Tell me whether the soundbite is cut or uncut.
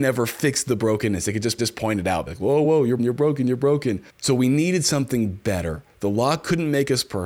cut